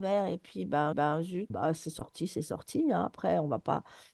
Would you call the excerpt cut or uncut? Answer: cut